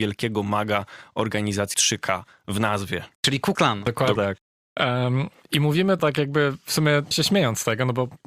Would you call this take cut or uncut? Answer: cut